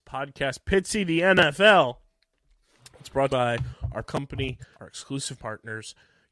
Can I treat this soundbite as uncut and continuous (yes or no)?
no